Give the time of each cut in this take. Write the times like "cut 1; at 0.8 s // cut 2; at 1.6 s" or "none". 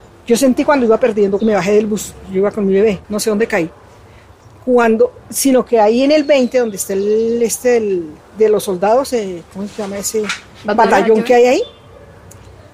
cut 1; at 1.4 s // cut 2; at 3.0 s // cut 3; at 5.2 s // cut 4; at 8.2 s